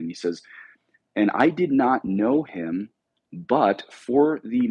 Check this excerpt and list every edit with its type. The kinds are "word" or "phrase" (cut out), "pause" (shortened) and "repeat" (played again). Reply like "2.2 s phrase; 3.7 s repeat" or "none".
none